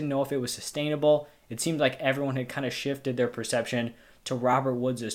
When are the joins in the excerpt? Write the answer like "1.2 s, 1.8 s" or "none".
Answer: none